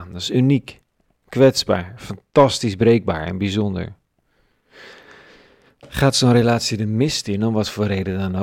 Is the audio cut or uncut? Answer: uncut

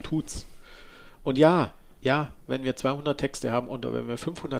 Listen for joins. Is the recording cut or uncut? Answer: uncut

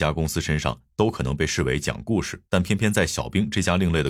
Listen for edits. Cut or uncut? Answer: cut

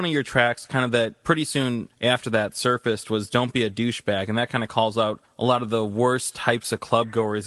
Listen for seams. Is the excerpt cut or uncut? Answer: uncut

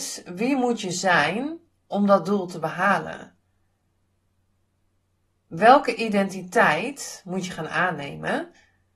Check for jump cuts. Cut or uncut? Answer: uncut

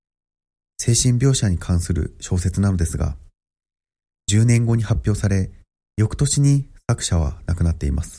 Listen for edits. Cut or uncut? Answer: uncut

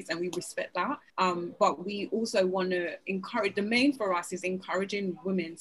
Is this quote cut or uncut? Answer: cut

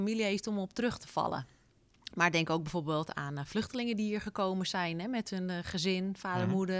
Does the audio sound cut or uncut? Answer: uncut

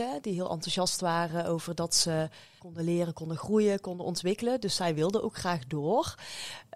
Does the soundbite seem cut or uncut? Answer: cut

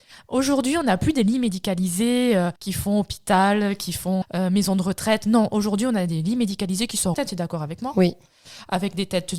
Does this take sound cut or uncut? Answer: cut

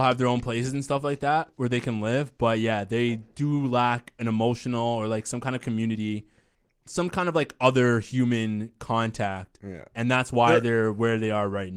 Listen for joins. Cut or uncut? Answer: uncut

